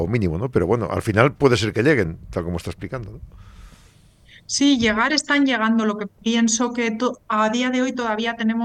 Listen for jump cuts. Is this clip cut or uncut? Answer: cut